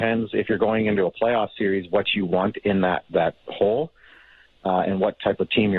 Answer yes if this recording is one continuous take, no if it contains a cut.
yes